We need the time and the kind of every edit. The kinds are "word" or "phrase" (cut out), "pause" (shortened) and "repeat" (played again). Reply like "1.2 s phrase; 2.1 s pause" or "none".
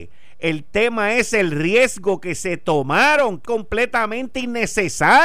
3.4 s word